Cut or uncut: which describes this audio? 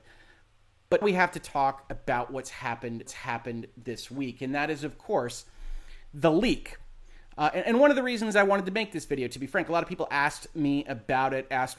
cut